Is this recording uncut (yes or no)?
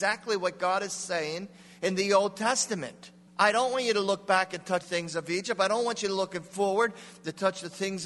no